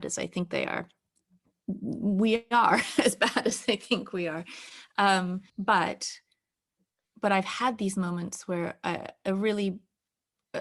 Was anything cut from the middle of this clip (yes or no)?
yes